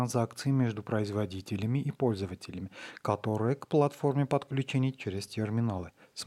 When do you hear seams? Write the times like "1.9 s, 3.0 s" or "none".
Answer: none